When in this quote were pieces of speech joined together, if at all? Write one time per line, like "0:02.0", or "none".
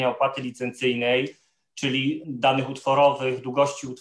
none